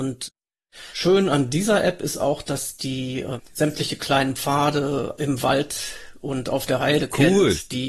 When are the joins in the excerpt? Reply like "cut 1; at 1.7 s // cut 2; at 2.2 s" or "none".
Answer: none